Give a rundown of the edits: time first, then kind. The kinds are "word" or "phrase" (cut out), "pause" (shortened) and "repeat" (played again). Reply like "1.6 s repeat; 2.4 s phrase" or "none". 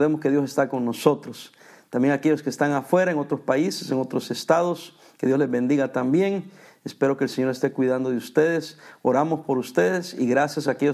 none

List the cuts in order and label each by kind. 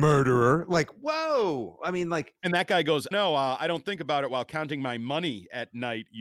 3.1 s phrase

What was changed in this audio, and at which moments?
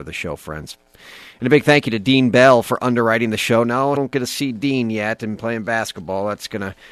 4.0 s word

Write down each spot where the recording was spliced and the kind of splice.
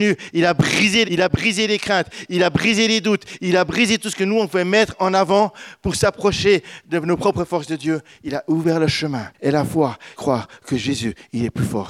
1.0 s word; 9.3 s pause; 10.2 s word

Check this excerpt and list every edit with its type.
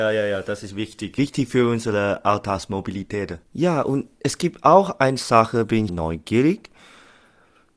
3.5 s pause; 5.9 s phrase

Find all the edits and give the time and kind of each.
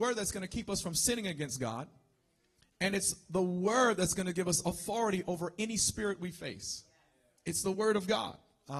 none

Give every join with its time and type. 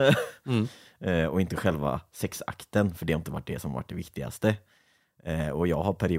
none

